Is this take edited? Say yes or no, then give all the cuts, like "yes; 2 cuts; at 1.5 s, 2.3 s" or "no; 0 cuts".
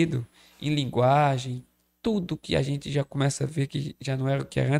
no; 0 cuts